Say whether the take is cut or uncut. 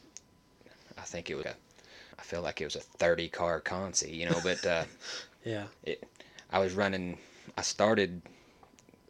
cut